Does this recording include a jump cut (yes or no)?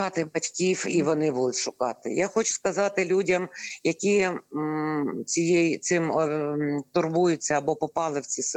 no